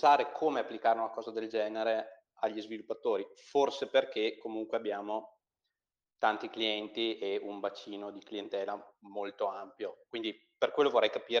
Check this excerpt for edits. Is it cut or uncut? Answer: uncut